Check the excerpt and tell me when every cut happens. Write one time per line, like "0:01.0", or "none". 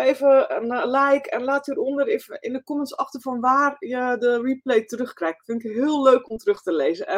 none